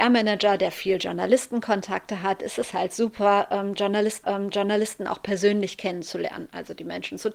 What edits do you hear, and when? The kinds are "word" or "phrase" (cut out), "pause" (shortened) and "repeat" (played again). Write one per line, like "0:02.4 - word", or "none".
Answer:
0:04.2 - repeat